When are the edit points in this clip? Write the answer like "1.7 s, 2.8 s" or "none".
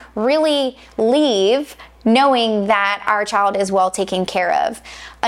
none

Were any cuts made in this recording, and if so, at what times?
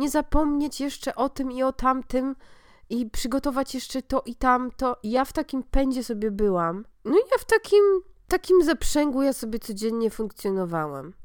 none

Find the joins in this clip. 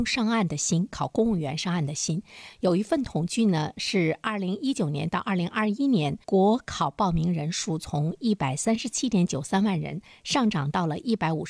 6.2 s

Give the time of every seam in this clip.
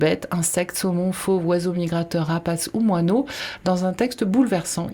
none

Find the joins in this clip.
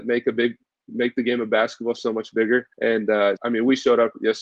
2.7 s, 3.4 s

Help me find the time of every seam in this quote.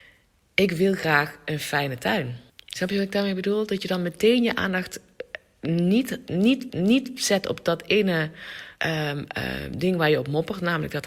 2.5 s, 6.7 s, 8.8 s

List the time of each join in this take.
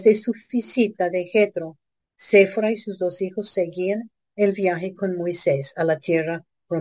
none

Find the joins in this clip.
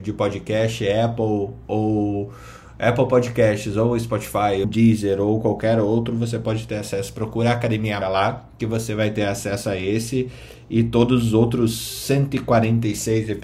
4.6 s, 8.0 s

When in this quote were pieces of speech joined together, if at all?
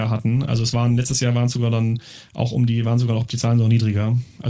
none

